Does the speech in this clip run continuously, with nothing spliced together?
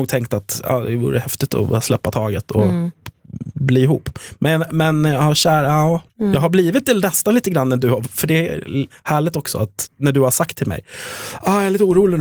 no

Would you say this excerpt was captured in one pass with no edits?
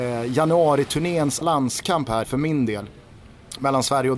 no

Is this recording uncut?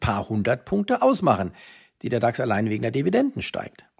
yes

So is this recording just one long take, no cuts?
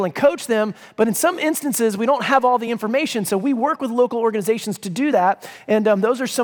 yes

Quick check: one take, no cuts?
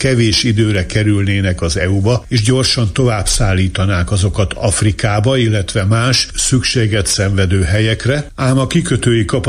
yes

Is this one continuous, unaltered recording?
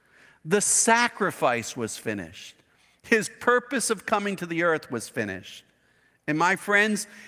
yes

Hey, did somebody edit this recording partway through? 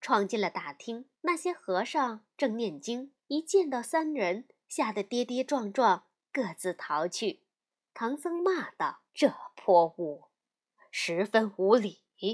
yes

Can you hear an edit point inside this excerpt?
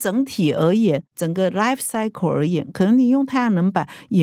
no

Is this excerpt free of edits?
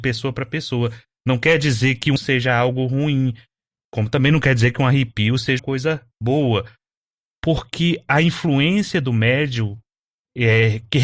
no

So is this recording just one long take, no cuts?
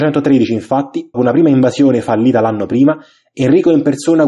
no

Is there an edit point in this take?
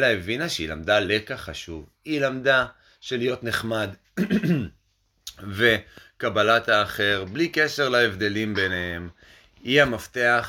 no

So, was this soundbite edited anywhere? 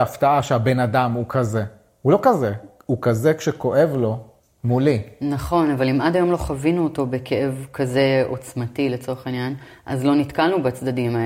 no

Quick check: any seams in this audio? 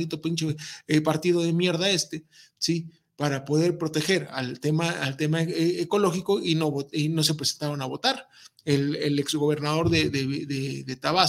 no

